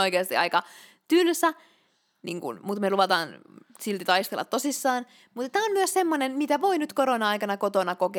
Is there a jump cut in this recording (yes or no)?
no